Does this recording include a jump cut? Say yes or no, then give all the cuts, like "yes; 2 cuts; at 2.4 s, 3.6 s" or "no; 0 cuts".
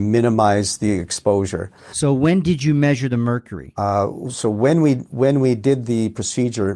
no; 0 cuts